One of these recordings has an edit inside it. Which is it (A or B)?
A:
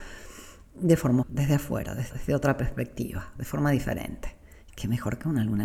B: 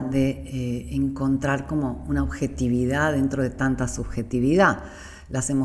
A